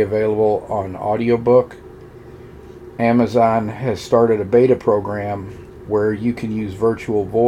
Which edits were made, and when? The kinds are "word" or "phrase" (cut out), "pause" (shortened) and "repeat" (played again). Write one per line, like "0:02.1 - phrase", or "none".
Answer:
none

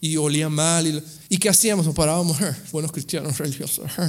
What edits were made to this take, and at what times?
0:02.7 - word

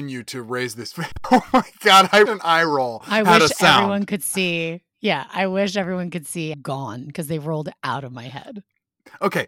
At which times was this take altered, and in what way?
0:02.3 - word
0:06.5 - phrase

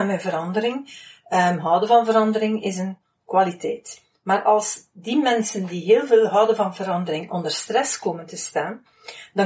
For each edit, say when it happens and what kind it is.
none

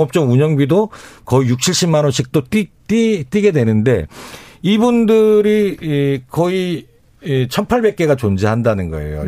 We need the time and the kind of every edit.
0:02.7 - pause

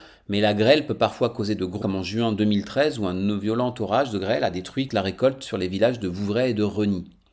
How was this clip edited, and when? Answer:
0:01.8 - word
0:04.9 - phrase

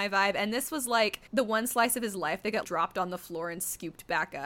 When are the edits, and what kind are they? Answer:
0:01.3 - pause
0:02.6 - word

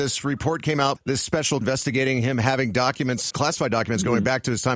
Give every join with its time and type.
0:01.0 - word
0:01.6 - word
0:03.3 - word

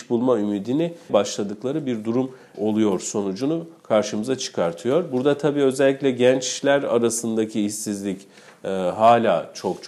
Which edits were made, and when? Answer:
0:01.1 - word
0:02.5 - word

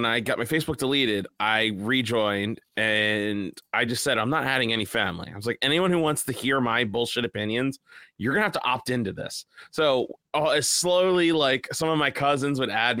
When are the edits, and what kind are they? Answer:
none

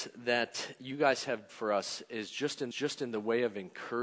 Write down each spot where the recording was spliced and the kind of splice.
0:01.5 - word
0:02.7 - repeat

